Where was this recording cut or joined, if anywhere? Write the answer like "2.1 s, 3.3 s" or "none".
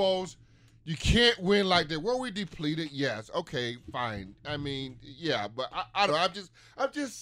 6.1 s